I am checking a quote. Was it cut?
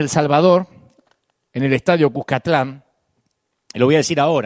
no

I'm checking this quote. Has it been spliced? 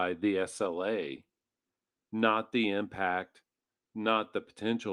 no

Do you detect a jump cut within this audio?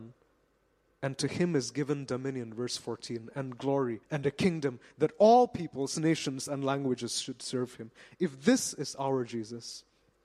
yes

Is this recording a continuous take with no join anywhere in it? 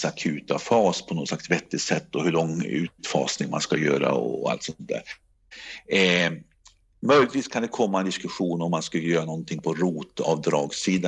yes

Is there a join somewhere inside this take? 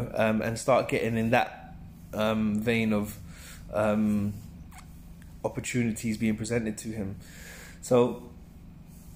no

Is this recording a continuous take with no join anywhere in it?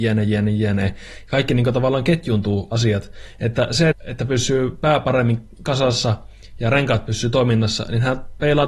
no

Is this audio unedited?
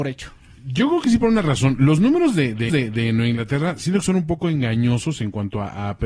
no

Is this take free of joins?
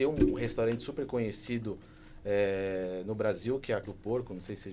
no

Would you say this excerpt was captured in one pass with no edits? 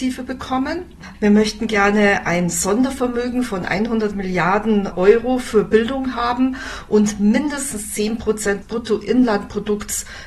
no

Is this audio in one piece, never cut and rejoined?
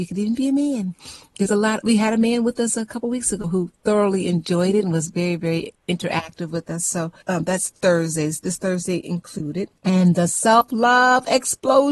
no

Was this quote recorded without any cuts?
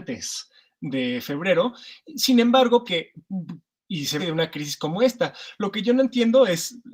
no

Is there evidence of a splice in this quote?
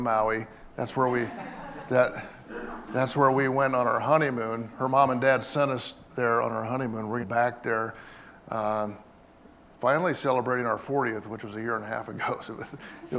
yes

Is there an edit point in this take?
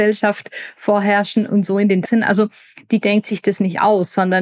yes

